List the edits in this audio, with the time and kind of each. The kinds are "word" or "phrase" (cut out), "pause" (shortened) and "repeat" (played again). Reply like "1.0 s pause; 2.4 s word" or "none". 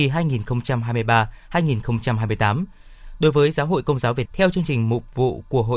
4.3 s word